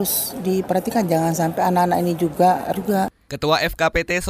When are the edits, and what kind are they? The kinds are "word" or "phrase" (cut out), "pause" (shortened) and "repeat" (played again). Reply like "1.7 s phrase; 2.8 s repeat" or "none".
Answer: 2.7 s word